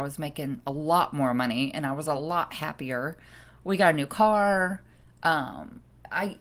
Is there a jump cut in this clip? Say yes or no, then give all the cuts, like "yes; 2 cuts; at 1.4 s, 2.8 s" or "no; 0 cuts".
no; 0 cuts